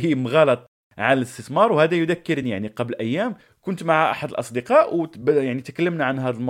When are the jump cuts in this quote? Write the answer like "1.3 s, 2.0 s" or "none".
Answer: none